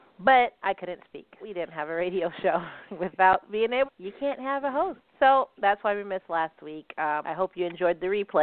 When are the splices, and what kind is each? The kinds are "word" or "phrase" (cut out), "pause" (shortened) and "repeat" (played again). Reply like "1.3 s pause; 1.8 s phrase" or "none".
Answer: 1.4 s word; 2.9 s pause; 3.8 s phrase; 5.1 s pause; 7.2 s word